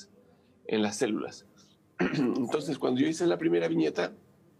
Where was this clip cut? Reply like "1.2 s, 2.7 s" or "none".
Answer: none